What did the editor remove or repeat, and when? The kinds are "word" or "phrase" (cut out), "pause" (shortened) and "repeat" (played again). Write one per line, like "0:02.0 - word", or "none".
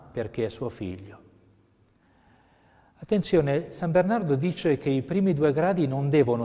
none